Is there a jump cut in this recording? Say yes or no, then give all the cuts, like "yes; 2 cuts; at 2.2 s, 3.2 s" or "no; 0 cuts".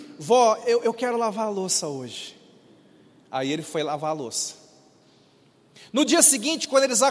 no; 0 cuts